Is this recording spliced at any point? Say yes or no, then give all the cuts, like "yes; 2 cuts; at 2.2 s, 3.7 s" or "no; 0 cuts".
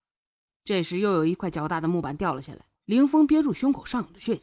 yes; 1 cut; at 2.7 s